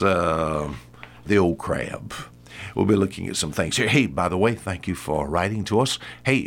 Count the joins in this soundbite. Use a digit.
1